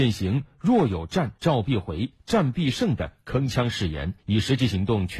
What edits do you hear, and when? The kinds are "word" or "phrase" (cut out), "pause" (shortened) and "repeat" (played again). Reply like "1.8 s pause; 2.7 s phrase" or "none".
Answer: 1.4 s pause; 4.2 s pause

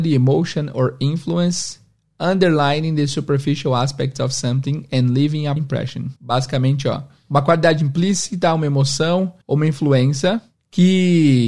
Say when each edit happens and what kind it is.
5.6 s word; 6.2 s pause; 9.4 s pause

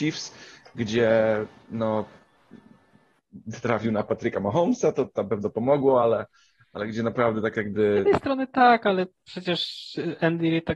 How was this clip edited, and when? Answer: none

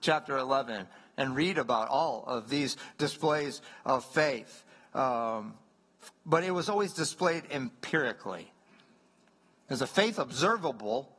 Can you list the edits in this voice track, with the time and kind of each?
none

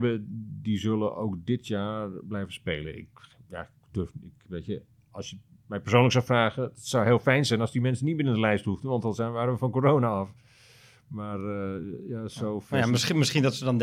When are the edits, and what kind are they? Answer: none

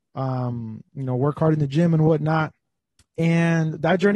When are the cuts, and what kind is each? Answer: 3.0 s pause

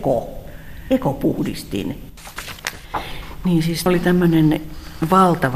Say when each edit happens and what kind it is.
3.9 s word

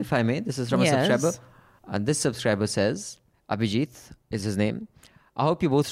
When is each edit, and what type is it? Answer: none

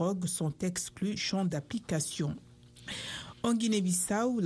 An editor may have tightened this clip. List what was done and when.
1.2 s word

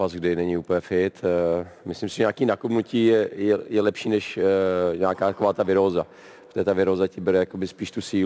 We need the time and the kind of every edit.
none

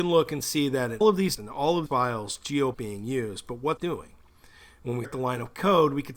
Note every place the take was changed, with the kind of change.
1.0 s word; 1.4 s word; 1.9 s word; 2.7 s word; 3.8 s word; 5.0 s word

